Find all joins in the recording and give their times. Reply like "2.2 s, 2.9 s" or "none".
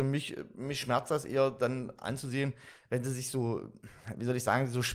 none